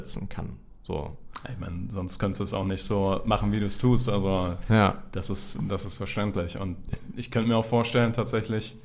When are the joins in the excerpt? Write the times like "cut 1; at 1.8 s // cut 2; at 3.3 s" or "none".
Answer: none

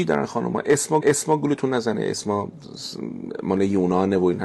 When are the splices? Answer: cut 1; at 1.0 s

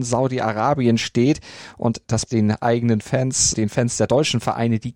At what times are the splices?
cut 1; at 2.3 s // cut 2; at 3.5 s

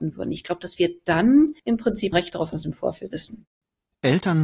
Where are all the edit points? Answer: cut 1; at 1.6 s // cut 2; at 2.1 s // cut 3; at 2.5 s // cut 4; at 3.1 s

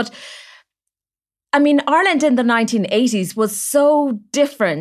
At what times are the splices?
none

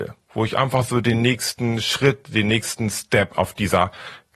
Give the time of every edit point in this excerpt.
none

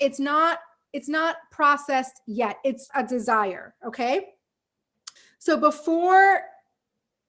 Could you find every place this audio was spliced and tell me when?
cut 1; at 2.9 s // cut 2; at 5.2 s

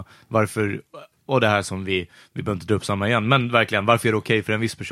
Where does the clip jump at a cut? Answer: none

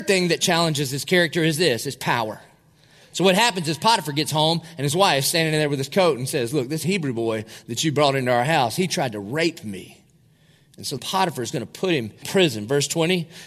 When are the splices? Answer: cut 1; at 11.0 s // cut 2; at 12.2 s

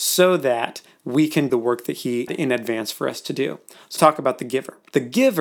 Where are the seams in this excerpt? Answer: cut 1; at 1.5 s // cut 2; at 2.3 s // cut 3; at 4.0 s

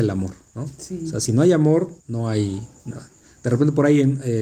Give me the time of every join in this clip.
cut 1; at 2.0 s

